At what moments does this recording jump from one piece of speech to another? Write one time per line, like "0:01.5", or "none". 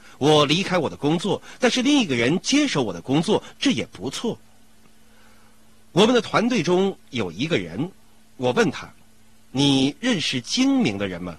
none